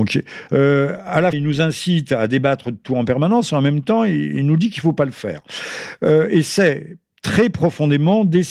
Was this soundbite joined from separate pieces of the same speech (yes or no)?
yes